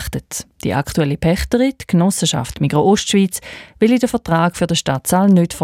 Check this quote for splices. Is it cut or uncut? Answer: uncut